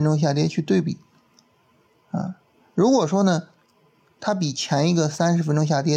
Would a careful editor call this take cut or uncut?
uncut